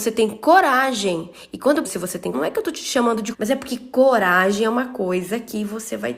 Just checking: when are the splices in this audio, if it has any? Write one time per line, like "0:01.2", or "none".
0:01.8
0:02.3
0:03.3